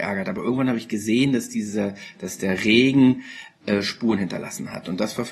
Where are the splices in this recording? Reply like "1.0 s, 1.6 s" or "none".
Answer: none

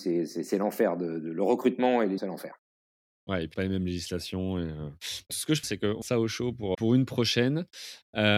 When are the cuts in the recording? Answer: 2.2 s, 3.5 s, 5.3 s, 5.6 s, 6.0 s, 6.7 s

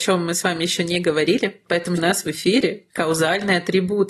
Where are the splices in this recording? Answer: 2.0 s

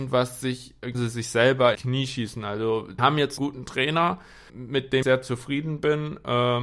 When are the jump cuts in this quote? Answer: 0.9 s, 1.7 s, 3.0 s, 3.4 s, 4.5 s, 5.0 s

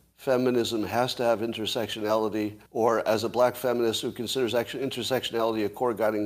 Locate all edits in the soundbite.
2.7 s

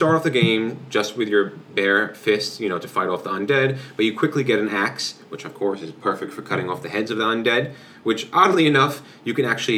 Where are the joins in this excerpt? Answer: none

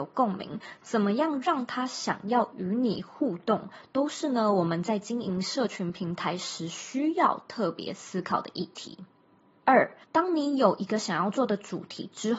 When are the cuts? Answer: 10.0 s

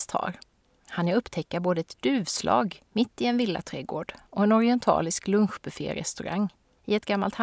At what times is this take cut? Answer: 2.9 s

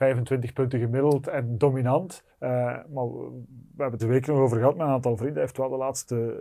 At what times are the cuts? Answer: 2.3 s, 4.0 s

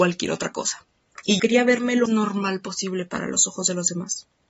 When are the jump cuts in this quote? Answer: 1.4 s, 2.1 s

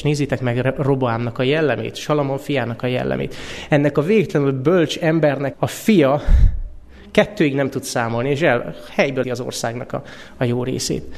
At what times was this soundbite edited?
5.5 s, 9.2 s

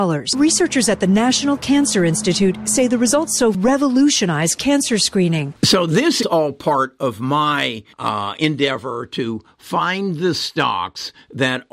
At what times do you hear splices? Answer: 3.5 s, 6.2 s, 7.9 s

